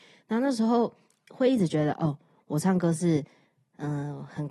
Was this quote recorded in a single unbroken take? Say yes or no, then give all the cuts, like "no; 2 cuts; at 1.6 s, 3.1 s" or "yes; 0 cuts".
yes; 0 cuts